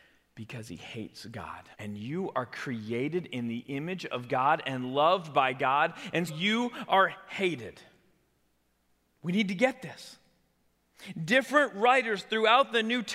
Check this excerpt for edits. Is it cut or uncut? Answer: cut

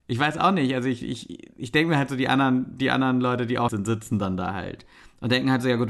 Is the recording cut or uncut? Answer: cut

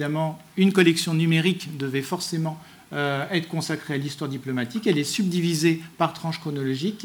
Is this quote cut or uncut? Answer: uncut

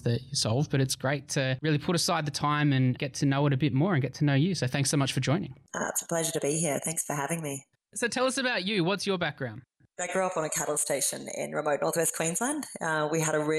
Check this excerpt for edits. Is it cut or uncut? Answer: uncut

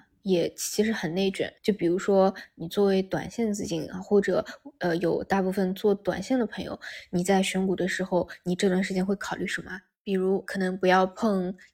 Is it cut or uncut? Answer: cut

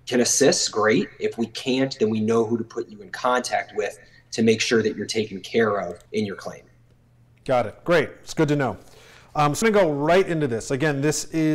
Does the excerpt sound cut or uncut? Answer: cut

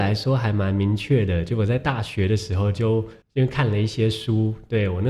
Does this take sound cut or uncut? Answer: cut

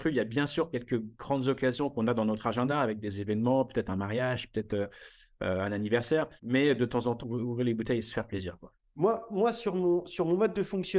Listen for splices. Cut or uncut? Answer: cut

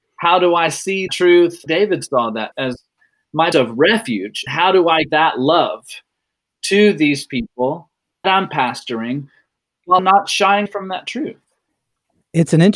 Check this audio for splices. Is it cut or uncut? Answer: cut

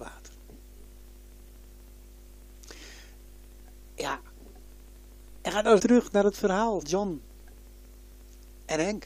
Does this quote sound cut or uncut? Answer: cut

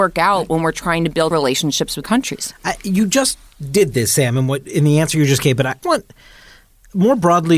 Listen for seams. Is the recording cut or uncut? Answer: cut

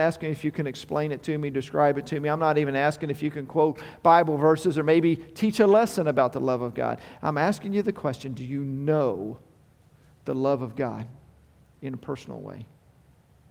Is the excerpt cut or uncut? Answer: uncut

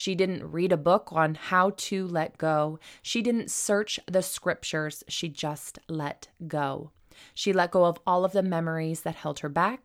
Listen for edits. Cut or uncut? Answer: uncut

